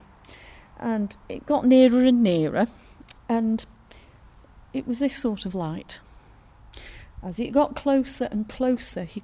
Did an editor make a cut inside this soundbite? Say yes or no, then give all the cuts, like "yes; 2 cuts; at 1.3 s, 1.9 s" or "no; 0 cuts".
no; 0 cuts